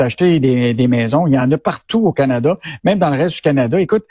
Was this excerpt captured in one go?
yes; 0 cuts

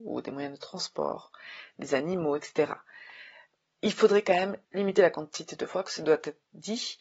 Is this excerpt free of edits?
yes; 0 cuts

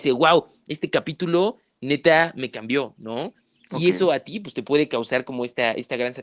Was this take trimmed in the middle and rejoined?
no; 0 cuts

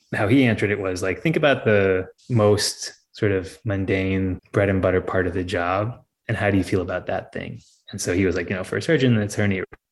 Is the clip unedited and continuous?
no; 1 cut; at 2.2 s

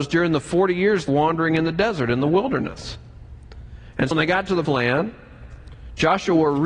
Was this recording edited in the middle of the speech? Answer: yes; 3 cuts; at 1.1 s, 4.1 s, 4.6 s

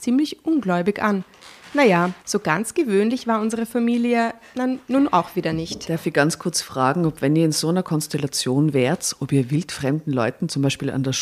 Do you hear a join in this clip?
yes; 1 cut; at 2.2 s

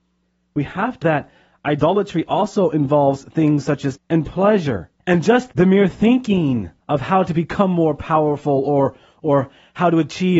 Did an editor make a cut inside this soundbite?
yes; 4 cuts; at 1.0 s, 4.0 s, 5.0 s, 6.8 s

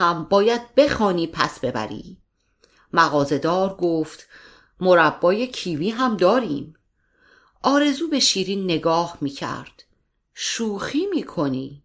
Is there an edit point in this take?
no; 0 cuts

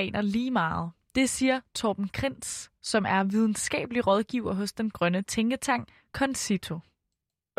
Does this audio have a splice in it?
no; 0 cuts

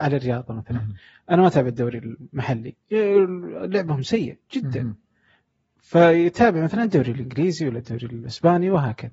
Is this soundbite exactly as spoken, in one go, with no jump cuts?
yes; 0 cuts

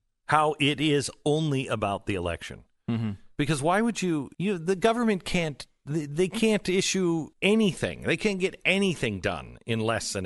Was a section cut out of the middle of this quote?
yes; 2 cuts; at 4.3 s, 7.3 s

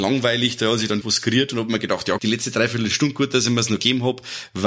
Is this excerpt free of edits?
no; 2 cuts; at 1.0 s, 2.2 s

